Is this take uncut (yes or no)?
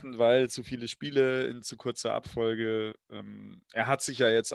no